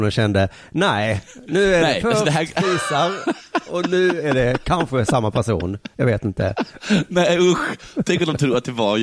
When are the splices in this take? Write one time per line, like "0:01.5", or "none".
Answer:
none